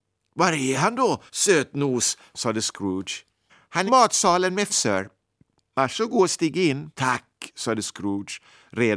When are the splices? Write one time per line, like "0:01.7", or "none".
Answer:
0:01.3
0:03.5
0:03.9
0:04.7
0:06.9